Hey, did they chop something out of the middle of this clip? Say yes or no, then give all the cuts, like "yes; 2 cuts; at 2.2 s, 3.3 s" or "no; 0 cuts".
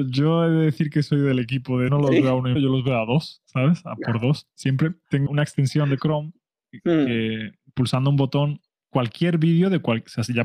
yes; 3 cuts; at 1.9 s, 2.6 s, 5.3 s